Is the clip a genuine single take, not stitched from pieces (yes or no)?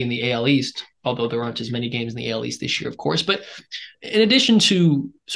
no